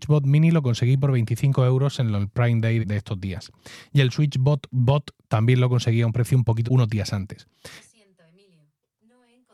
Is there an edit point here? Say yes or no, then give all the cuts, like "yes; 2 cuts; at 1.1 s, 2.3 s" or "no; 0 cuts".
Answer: yes; 3 cuts; at 2.8 s, 6.7 s, 7.8 s